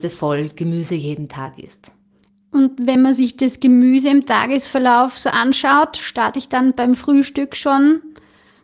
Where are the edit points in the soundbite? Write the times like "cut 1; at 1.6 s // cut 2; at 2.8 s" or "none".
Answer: none